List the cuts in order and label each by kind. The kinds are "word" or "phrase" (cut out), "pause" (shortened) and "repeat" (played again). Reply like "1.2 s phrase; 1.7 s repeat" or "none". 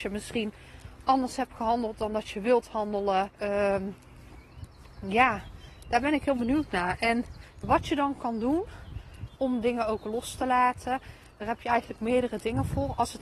3.3 s pause; 7.6 s word; 9.4 s word